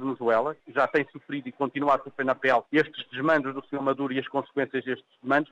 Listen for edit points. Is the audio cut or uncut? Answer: uncut